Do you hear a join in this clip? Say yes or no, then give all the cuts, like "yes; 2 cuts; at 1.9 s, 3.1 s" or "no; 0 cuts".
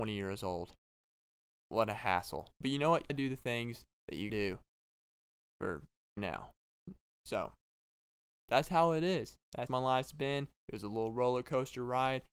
yes; 4 cuts; at 3.1 s, 4.3 s, 6.2 s, 9.7 s